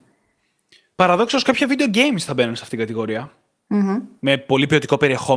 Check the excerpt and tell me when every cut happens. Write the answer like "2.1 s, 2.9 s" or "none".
none